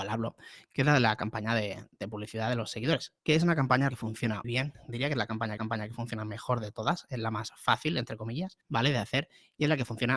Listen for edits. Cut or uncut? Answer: cut